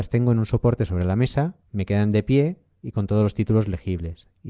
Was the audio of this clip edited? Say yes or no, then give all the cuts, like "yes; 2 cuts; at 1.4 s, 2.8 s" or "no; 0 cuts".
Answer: yes; 1 cut; at 1.7 s